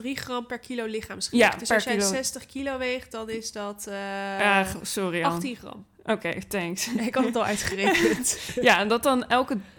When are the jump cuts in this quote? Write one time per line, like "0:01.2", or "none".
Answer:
none